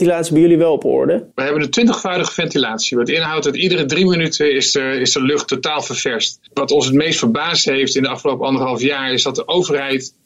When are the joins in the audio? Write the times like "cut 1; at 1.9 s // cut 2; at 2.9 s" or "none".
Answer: cut 1; at 1.3 s // cut 2; at 6.5 s